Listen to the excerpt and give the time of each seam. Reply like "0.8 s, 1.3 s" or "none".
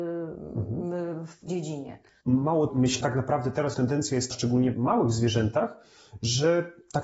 1.5 s, 2.7 s, 3.0 s, 3.7 s, 4.3 s, 4.7 s